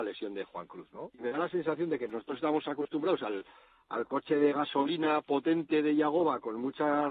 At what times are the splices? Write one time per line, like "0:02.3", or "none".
none